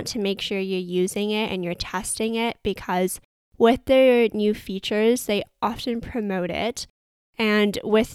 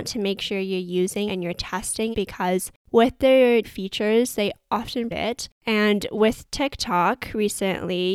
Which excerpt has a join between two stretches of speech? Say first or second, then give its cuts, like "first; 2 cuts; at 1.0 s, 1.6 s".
second; 6 cuts; at 1.3 s, 2.1 s, 2.8 s, 3.6 s, 5.1 s, 5.5 s